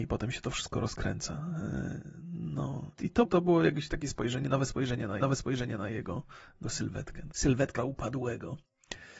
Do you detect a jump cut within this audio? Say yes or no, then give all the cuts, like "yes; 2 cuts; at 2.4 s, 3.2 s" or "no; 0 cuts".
yes; 6 cuts; at 2.9 s, 3.2 s, 5.2 s, 6.6 s, 7.3 s, 7.8 s